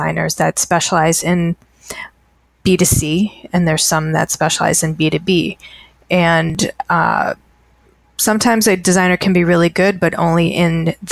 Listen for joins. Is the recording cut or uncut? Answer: uncut